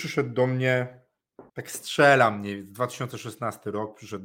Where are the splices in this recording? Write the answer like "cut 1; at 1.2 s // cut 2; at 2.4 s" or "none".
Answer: cut 1; at 1.5 s